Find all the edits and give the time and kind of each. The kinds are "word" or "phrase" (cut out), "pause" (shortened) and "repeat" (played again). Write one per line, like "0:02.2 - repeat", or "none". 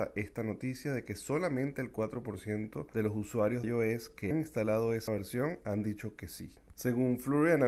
0:03.6 - word
0:04.3 - word
0:05.1 - word